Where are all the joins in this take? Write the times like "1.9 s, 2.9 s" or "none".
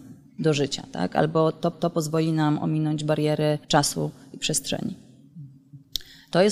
1.7 s, 3.6 s